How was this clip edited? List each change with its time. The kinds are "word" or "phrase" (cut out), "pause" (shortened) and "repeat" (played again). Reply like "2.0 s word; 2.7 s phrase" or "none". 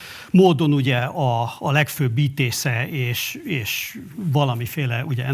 none